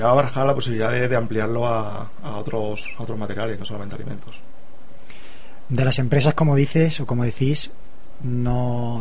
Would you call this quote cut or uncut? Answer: uncut